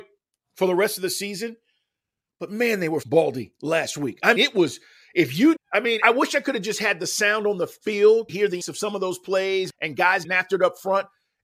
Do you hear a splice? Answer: yes; 8 cuts; at 3.0 s, 4.4 s, 5.6 s, 6.0 s, 8.3 s, 8.6 s, 9.7 s, 10.2 s

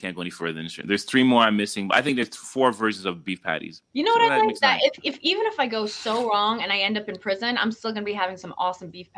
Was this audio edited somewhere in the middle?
no; 0 cuts

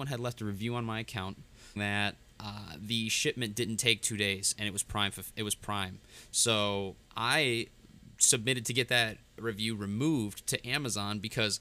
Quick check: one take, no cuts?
no; 2 cuts; at 1.8 s, 7.0 s

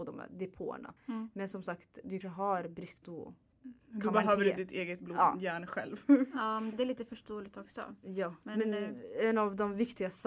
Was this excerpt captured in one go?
no; 5 cuts; at 1.0 s, 2.2 s, 3.0 s, 3.5 s, 6.7 s

